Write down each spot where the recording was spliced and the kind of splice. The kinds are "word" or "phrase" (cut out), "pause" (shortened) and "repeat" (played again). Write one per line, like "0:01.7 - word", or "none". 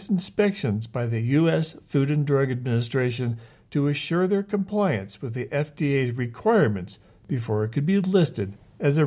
none